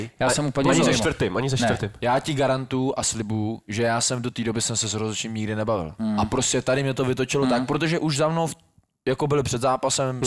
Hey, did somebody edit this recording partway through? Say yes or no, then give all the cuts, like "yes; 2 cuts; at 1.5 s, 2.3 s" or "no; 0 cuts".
no; 0 cuts